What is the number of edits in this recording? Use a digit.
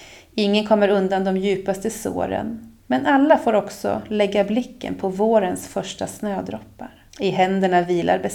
2